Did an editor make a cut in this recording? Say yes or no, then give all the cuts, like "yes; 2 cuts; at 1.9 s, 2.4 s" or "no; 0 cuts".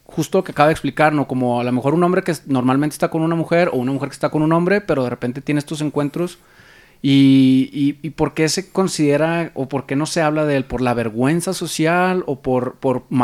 no; 0 cuts